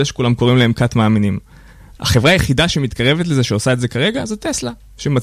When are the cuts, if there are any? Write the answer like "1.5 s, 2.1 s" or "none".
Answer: none